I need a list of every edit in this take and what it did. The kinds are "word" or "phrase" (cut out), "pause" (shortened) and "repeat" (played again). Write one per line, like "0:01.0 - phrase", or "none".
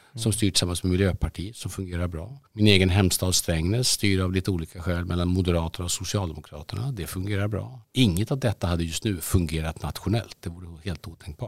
0:02.5 - pause
0:07.8 - pause